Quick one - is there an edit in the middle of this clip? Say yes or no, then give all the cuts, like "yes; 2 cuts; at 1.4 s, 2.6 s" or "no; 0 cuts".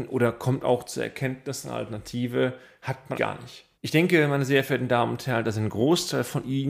yes; 2 cuts; at 3.2 s, 3.7 s